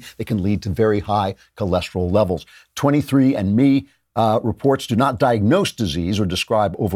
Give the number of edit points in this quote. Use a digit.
0